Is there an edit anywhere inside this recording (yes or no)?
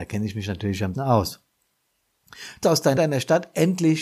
yes